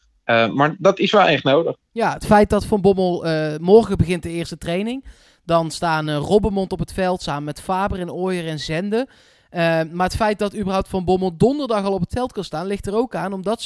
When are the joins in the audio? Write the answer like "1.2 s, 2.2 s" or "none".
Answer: none